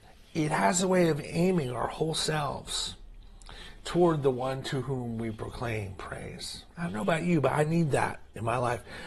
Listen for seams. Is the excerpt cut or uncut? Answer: cut